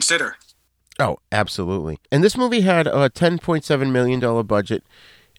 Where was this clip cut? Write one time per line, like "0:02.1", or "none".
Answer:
0:02.0